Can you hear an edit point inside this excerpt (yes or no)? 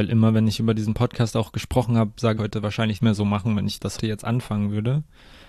yes